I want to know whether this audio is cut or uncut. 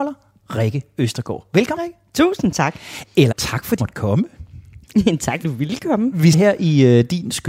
cut